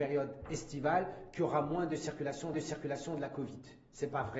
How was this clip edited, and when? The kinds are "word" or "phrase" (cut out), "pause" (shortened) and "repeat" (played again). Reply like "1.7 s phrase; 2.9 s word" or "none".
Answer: 2.5 s repeat